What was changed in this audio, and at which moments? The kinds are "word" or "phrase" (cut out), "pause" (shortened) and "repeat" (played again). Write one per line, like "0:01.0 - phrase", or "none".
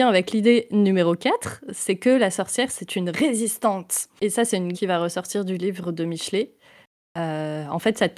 0:04.2 - pause
0:04.7 - phrase